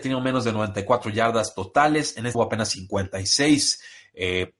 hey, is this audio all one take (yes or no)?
no